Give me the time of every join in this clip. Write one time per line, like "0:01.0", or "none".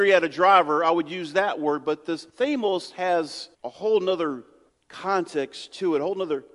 0:02.3
0:03.5
0:04.7

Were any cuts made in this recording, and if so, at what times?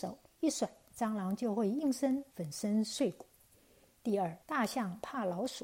0:02.3
0:04.4

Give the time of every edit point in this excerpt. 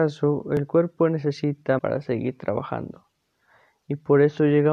0:01.8

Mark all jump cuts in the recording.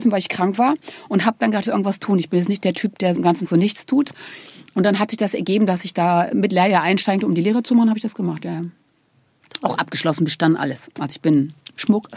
0:01.7
0:03.2
0:03.5
0:06.5
0:07.2

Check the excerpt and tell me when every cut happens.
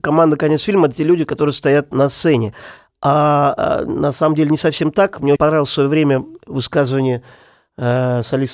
0:05.4

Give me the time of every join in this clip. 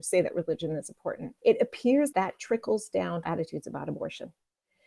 0:01.4
0:02.1
0:03.2

